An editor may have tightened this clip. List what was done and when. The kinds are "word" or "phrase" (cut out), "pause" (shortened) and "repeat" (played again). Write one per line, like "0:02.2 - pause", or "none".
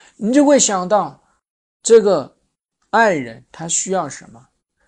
none